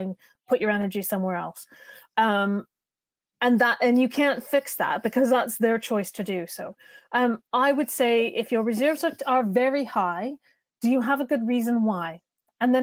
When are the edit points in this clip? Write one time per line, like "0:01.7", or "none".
none